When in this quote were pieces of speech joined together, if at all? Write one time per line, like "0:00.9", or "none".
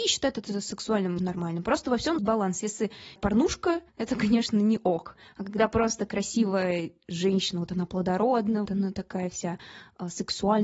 0:01.2
0:02.2
0:03.2
0:03.9
0:08.7